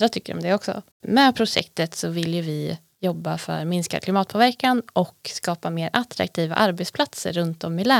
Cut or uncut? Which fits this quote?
cut